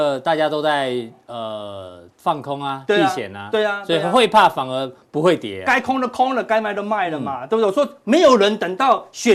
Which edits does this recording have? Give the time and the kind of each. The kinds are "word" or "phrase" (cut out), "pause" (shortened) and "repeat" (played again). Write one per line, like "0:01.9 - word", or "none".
0:02.1 - pause